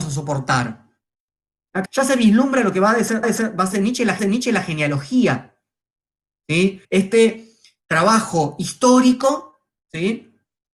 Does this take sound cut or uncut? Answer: cut